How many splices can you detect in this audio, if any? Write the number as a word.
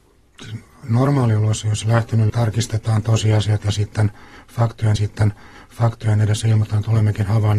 three